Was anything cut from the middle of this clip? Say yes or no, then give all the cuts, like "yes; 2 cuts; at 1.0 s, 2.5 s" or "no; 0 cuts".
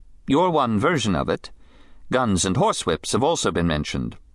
no; 0 cuts